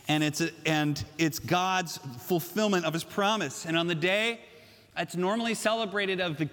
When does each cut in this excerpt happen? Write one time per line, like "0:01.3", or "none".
none

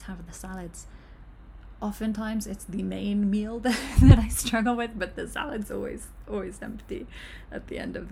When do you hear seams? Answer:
none

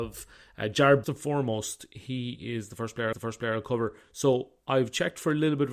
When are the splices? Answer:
0:01.0
0:03.1

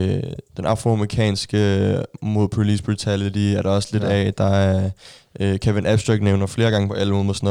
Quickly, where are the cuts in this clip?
none

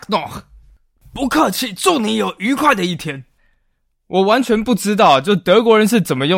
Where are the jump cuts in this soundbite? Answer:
none

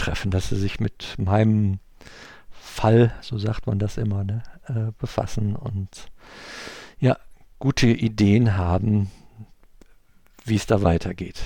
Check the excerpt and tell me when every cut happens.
none

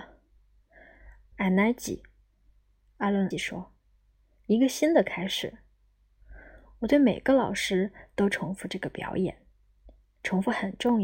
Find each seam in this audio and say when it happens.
0:01.3
0:03.3

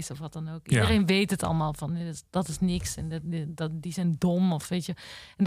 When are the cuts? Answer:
none

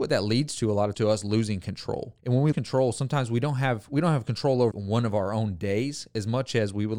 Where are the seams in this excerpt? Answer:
0:00.9
0:02.2
0:02.5
0:04.7

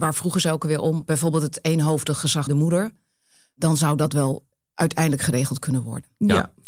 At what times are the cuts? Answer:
0:02.5

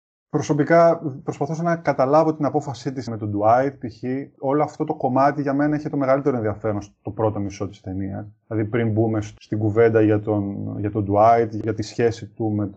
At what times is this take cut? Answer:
0:03.1

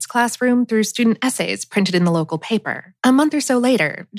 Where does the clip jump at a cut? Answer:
0:03.0

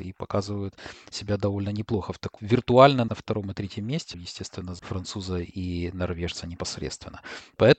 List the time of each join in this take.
0:02.4
0:03.1
0:04.1
0:04.8

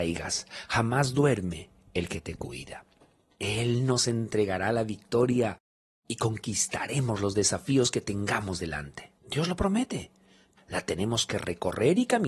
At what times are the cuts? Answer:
0:09.2
0:10.6

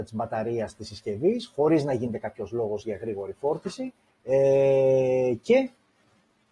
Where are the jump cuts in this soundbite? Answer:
0:04.1

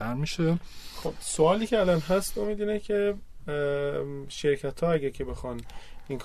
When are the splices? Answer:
none

